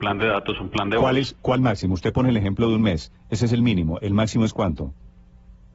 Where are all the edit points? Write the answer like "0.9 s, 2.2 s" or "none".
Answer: 1.6 s